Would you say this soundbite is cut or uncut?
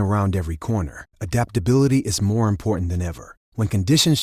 uncut